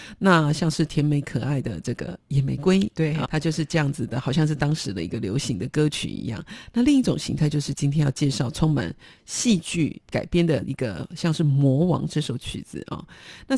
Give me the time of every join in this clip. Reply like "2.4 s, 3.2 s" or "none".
3.2 s